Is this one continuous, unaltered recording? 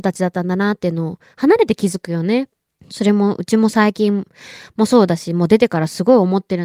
no; 1 cut; at 2.8 s

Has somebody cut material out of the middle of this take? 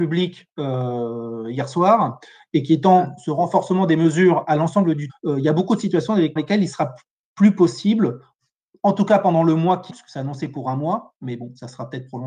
yes; 3 cuts; at 5.1 s, 6.4 s, 9.9 s

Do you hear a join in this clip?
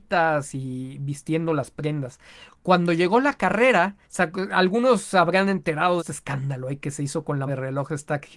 yes; 3 cuts; at 4.0 s, 6.0 s, 7.5 s

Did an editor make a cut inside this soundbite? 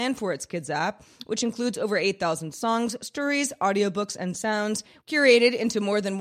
no; 0 cuts

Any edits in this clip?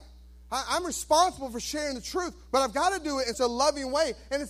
yes; 1 cut; at 3.3 s

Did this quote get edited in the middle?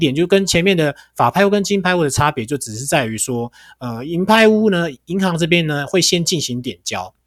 no; 0 cuts

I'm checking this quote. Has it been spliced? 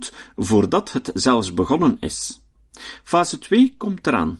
no; 0 cuts

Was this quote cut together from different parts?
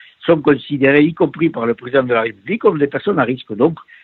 no; 0 cuts

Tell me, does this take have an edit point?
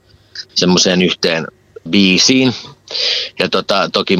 yes; 1 cut; at 1.9 s

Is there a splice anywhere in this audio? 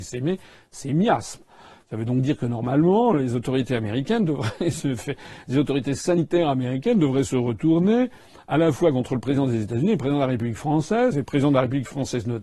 no; 0 cuts

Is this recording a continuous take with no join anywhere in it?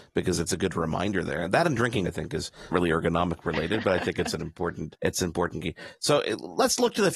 no; 3 cuts; at 2.1 s, 2.7 s, 5.0 s

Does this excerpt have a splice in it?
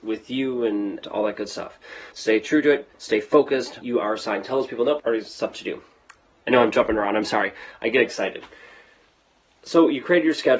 yes; 4 cuts; at 1.0 s, 2.1 s, 3.8 s, 5.0 s

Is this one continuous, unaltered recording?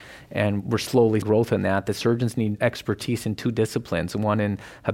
no; 1 cut; at 1.2 s

